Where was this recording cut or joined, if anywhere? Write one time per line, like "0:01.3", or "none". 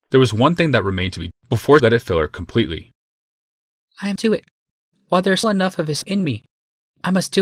0:01.3
0:01.8
0:04.2
0:05.4
0:06.0